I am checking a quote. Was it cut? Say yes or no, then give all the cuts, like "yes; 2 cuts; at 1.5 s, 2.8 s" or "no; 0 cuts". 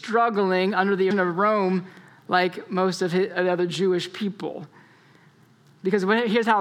yes; 1 cut; at 1.1 s